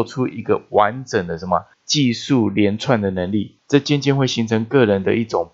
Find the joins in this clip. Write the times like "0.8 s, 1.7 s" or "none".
1.7 s, 3.6 s